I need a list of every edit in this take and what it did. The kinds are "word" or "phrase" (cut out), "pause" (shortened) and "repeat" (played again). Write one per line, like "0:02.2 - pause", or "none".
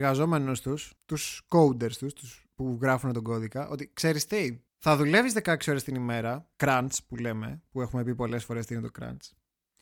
0:01.0 - pause
0:04.7 - pause
0:06.5 - pause